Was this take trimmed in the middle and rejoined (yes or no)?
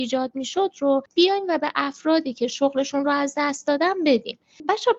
no